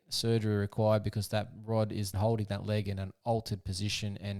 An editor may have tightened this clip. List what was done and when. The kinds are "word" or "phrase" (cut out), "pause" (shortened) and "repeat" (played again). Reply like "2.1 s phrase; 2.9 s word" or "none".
2.1 s word